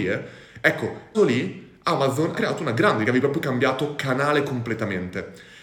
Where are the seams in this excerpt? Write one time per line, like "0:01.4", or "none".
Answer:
0:01.1
0:02.3
0:03.0